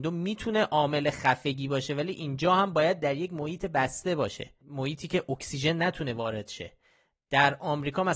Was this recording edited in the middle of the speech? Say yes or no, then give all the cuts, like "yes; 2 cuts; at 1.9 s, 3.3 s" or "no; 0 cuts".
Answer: no; 0 cuts